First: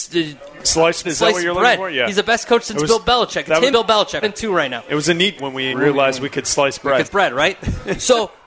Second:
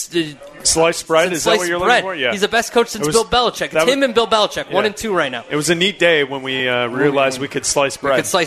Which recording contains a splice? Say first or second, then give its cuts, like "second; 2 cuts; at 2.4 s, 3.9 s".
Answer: first; 6 cuts; at 1.0 s, 3.7 s, 4.2 s, 5.4 s, 5.7 s, 7.0 s